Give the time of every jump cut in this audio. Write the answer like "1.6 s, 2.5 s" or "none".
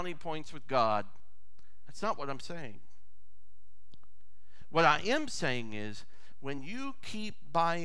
none

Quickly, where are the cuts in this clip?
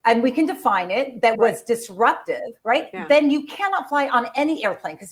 1.3 s, 2.6 s

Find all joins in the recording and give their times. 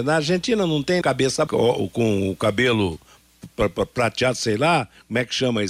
1.0 s, 1.5 s

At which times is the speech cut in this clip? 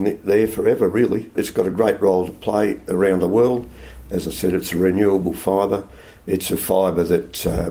none

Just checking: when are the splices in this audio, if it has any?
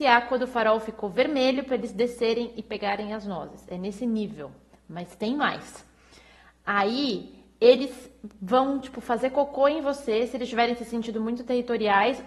none

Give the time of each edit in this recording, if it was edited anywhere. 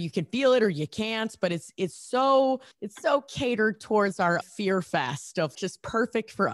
2.7 s, 4.4 s, 5.5 s

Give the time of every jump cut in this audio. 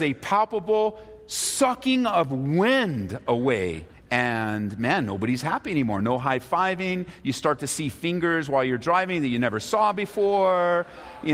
3.9 s

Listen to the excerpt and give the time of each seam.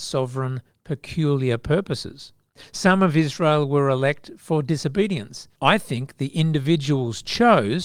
5.6 s

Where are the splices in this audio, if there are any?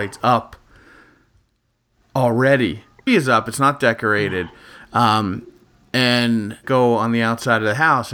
3.1 s, 6.6 s

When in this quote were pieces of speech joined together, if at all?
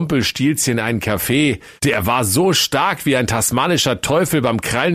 1.8 s

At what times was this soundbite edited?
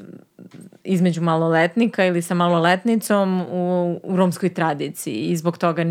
none

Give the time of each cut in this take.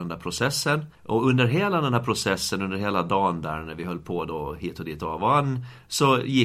0.9 s

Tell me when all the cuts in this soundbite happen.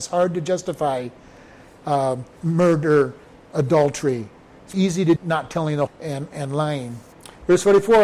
2.3 s, 4.7 s, 5.2 s, 5.9 s

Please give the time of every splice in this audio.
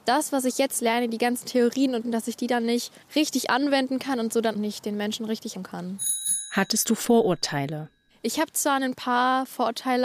2.0 s, 3.0 s, 4.5 s, 5.5 s

